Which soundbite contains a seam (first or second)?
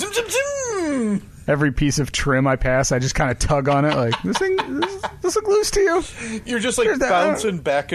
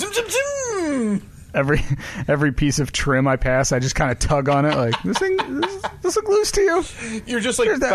first